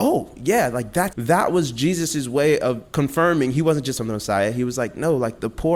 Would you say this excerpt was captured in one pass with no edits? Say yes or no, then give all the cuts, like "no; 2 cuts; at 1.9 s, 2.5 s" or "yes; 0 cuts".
no; 2 cuts; at 1.1 s, 4.0 s